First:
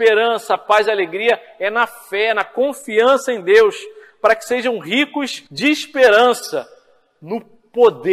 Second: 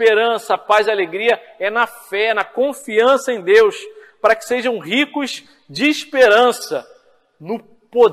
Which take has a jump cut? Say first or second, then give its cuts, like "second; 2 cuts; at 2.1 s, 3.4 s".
first; 1 cut; at 5.5 s